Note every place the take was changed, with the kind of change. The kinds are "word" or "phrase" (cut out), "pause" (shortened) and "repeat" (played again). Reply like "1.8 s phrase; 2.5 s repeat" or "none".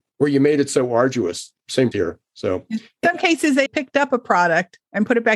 1.9 s word; 3.0 s word; 3.7 s word